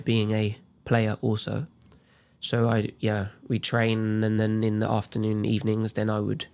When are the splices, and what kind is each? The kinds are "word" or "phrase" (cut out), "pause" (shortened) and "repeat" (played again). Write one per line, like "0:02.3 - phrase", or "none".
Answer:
none

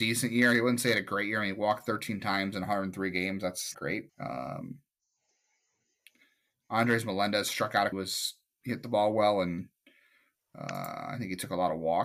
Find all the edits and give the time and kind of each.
0:03.7 - word
0:04.1 - pause
0:07.9 - phrase

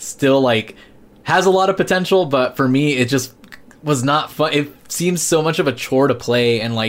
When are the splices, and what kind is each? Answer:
none

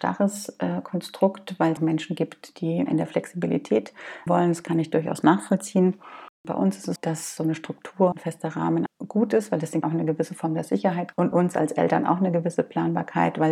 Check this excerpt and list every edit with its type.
0:01.8 - word
0:02.9 - word
0:04.3 - word
0:07.0 - word
0:07.4 - word
0:08.1 - word
0:08.9 - word
0:09.8 - word
0:11.1 - word

